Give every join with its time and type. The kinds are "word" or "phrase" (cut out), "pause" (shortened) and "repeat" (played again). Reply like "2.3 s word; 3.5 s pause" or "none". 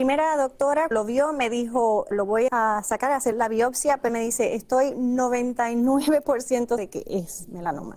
0.9 s word; 2.1 s word; 2.5 s word; 3.3 s word; 4.1 s word; 6.8 s word